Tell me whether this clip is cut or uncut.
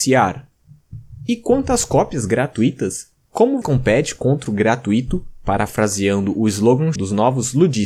cut